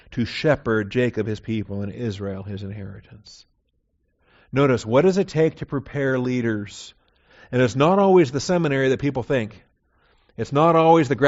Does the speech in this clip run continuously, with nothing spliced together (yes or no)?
yes